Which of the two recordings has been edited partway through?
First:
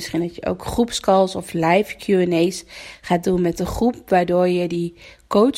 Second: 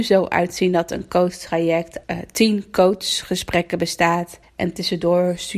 second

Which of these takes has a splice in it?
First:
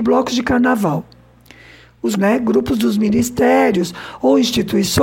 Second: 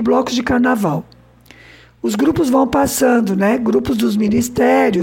first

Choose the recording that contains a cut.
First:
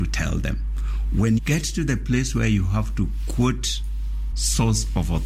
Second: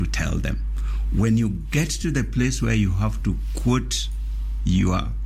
first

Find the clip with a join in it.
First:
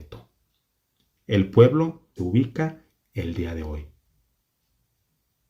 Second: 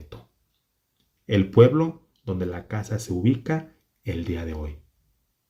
first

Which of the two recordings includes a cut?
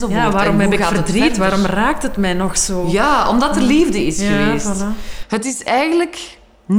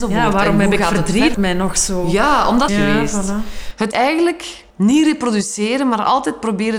second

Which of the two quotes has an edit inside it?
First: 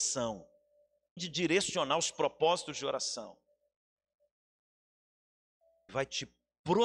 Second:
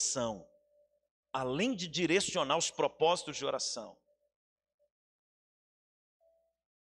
first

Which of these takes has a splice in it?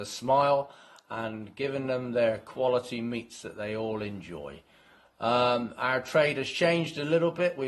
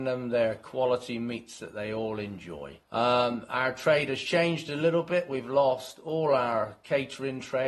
second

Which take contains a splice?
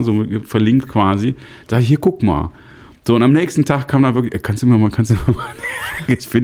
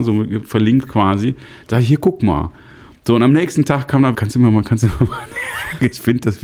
second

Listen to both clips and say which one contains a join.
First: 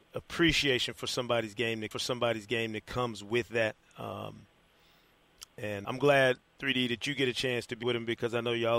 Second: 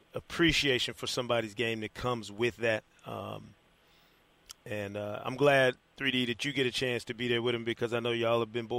first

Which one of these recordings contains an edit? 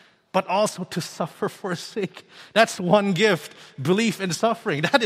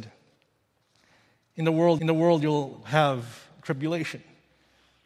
second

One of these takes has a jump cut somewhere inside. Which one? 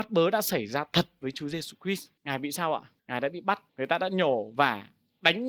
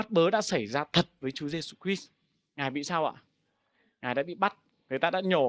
first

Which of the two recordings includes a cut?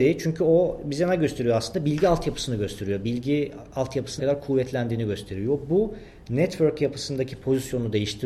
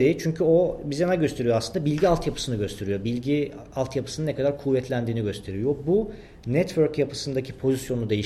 first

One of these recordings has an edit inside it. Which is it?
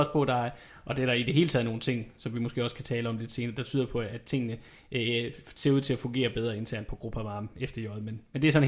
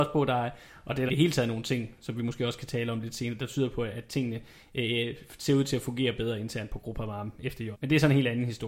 second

